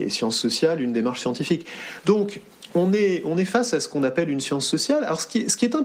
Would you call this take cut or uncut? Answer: uncut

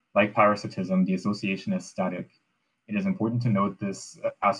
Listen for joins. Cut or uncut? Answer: uncut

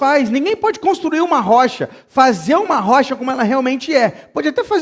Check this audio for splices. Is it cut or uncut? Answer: uncut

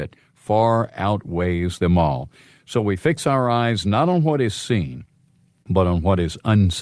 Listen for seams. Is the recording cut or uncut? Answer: uncut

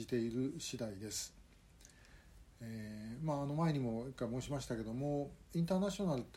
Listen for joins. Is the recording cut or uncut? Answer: uncut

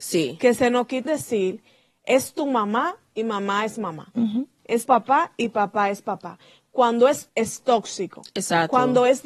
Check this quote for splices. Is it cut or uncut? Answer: cut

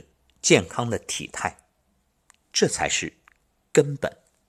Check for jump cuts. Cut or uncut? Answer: uncut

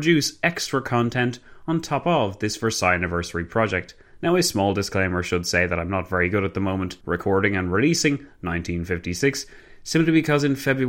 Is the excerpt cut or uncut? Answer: cut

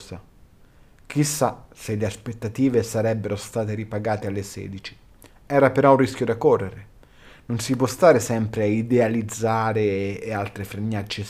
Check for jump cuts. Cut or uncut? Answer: uncut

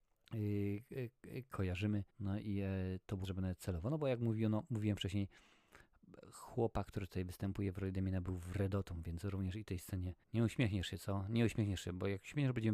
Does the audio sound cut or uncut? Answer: cut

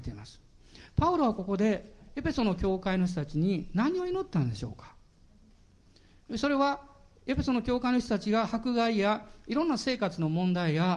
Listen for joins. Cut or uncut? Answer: uncut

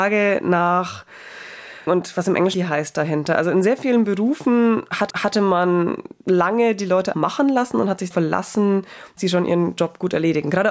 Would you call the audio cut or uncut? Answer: cut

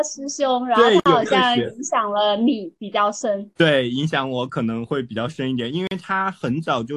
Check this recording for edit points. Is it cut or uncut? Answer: cut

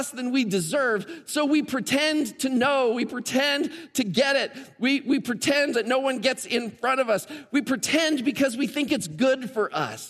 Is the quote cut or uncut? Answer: cut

